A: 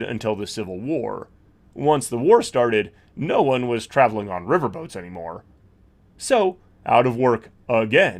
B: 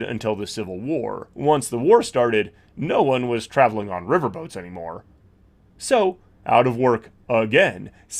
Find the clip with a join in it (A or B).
B